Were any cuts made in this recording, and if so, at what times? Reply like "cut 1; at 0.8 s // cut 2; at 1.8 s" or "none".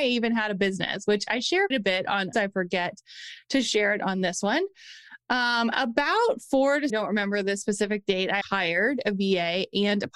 cut 1; at 1.7 s // cut 2; at 2.3 s // cut 3; at 6.9 s // cut 4; at 8.4 s

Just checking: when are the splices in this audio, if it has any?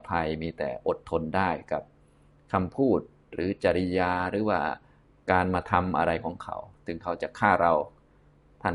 none

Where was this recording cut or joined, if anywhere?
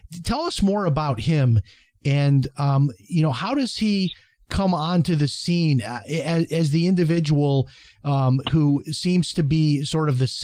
none

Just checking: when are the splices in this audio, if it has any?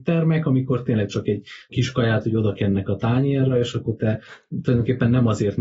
cut 1; at 1.7 s

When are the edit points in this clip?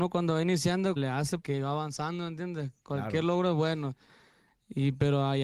cut 1; at 1.0 s // cut 2; at 1.4 s

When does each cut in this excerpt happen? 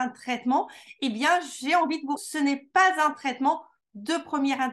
cut 1; at 2.2 s

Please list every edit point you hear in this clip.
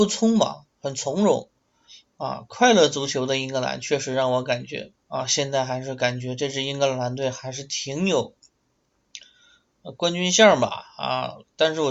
cut 1; at 5.0 s

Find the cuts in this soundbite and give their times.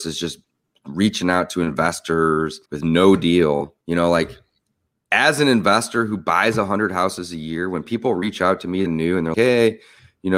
cut 1; at 2.7 s // cut 2; at 3.8 s // cut 3; at 8.9 s // cut 4; at 9.3 s

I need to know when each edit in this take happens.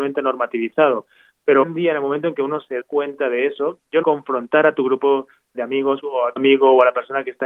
cut 1; at 1.6 s // cut 2; at 2.8 s // cut 3; at 4.0 s // cut 4; at 5.5 s // cut 5; at 6.0 s // cut 6; at 6.4 s

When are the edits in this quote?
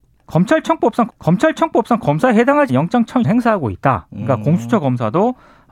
cut 1; at 1.1 s // cut 2; at 2.7 s // cut 3; at 3.2 s

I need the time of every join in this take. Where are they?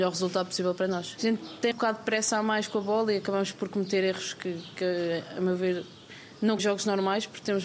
cut 1; at 1.7 s // cut 2; at 6.6 s

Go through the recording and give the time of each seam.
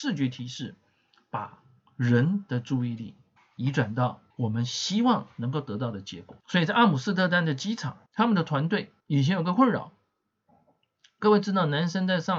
cut 1; at 3.4 s // cut 2; at 4.3 s // cut 3; at 6.4 s // cut 4; at 8.1 s // cut 5; at 9.0 s

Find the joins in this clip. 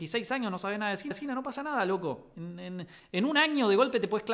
cut 1; at 1.1 s

